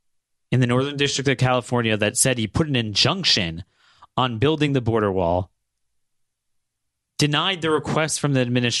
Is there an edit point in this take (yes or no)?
no